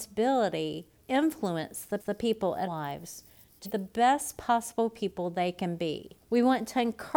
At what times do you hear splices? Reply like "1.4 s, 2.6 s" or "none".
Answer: 1.0 s, 2.0 s, 2.7 s, 3.6 s, 6.2 s